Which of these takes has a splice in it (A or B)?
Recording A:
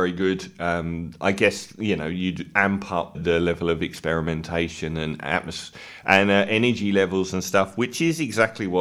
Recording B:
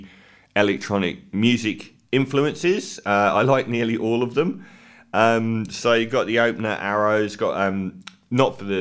A